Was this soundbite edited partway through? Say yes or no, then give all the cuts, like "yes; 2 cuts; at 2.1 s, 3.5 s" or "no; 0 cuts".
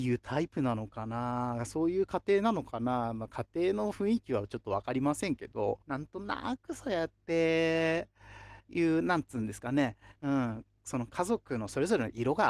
yes; 4 cuts; at 5.8 s, 8.6 s, 10.2 s, 10.8 s